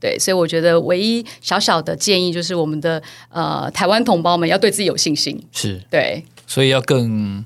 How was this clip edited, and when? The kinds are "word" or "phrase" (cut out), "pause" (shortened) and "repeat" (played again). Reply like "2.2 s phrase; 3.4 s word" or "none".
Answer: 6.4 s word

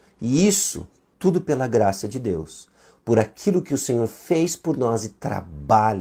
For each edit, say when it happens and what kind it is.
none

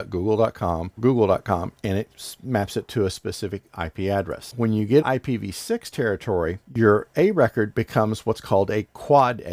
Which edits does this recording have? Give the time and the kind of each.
1.0 s word; 5.0 s word

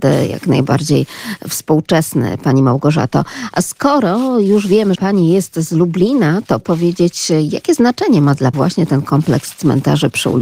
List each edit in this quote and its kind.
4.9 s word; 6.6 s word; 8.5 s word

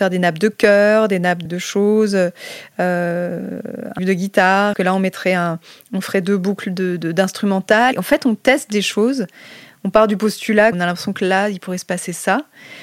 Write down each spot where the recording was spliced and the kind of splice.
1.5 s word; 4.0 s word; 4.7 s word; 7.9 s word; 10.7 s word

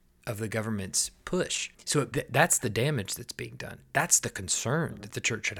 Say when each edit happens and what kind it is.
1.7 s pause; 2.1 s phrase

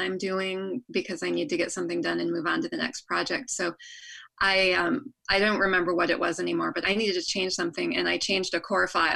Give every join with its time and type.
6.8 s word

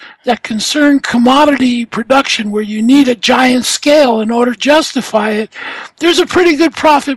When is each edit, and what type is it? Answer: 4.6 s word

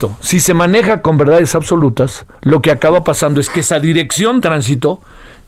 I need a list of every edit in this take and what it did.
2.4 s pause; 4.4 s word

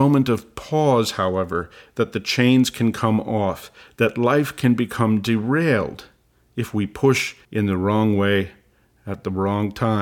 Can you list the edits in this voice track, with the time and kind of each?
7.4 s pause

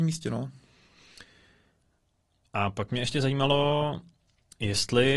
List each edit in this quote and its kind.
none

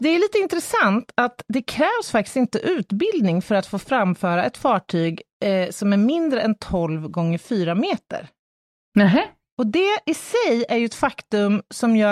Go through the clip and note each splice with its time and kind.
none

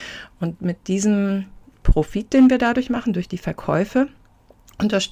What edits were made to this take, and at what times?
none

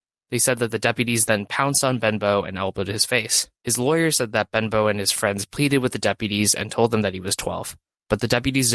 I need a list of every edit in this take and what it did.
3.6 s pause

